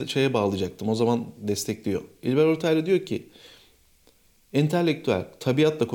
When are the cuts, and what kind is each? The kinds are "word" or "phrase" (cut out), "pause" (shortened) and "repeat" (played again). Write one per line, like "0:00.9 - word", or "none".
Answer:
none